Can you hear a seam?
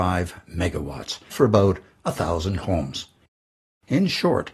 yes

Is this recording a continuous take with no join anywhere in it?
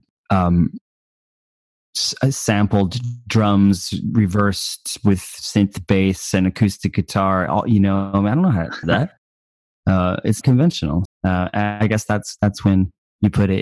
no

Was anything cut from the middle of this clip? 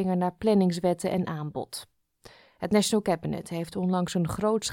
no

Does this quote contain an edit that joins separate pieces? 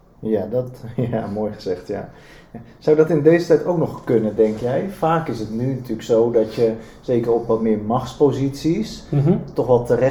no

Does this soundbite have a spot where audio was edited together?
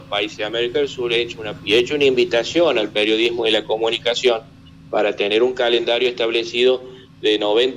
yes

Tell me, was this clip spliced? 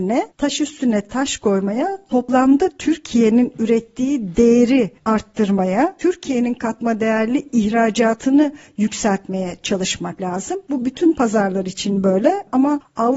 no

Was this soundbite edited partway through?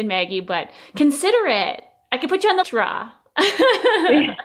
yes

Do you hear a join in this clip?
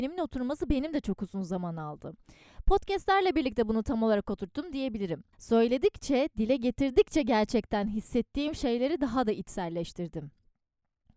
yes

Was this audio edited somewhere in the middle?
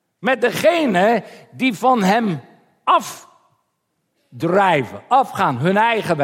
no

